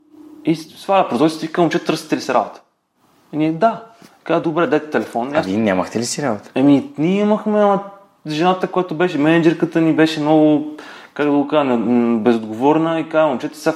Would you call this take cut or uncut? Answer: uncut